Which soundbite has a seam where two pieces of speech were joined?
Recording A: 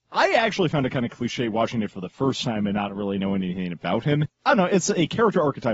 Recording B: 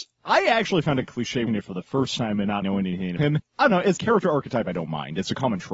B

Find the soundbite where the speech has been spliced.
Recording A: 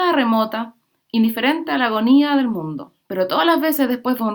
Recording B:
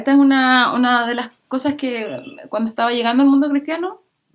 A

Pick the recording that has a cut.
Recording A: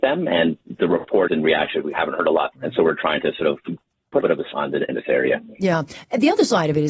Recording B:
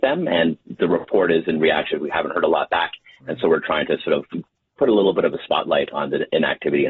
A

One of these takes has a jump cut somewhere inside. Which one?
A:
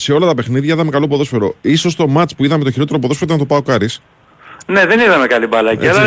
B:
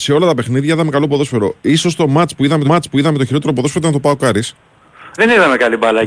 B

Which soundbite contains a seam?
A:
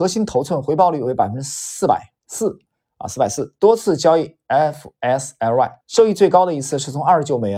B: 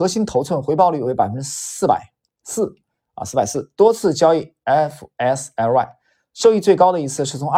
A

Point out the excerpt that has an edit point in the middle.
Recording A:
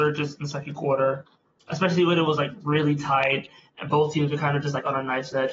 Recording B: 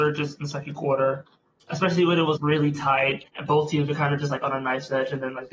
B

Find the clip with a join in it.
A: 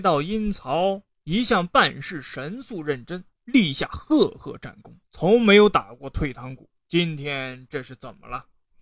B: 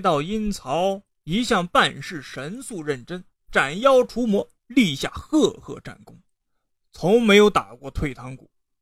A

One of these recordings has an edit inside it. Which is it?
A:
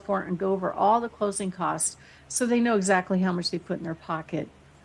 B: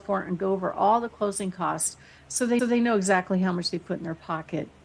B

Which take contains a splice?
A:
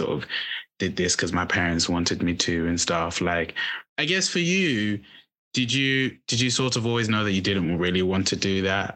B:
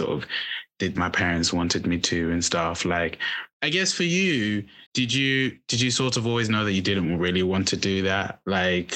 B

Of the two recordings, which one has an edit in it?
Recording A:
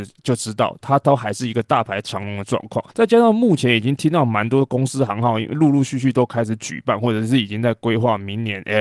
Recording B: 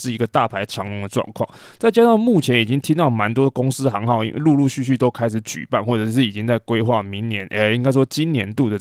A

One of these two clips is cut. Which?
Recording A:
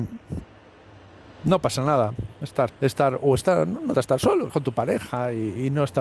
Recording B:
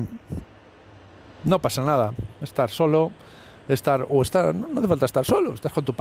A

